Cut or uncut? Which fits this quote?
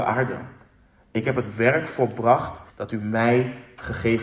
cut